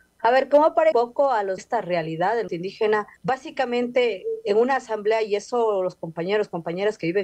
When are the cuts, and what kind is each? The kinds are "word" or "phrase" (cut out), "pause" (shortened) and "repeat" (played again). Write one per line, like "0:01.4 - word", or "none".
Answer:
0:00.9 - phrase
0:01.6 - phrase
0:02.5 - word
0:03.2 - pause